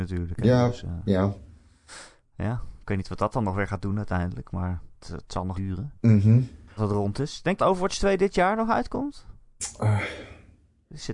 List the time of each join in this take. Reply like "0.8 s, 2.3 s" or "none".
5.0 s, 5.5 s, 6.8 s, 7.6 s